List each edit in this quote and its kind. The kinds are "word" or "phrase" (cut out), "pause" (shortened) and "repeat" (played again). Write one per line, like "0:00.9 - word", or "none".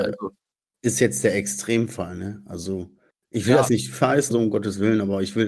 0:03.7 - word
0:04.0 - word
0:04.3 - word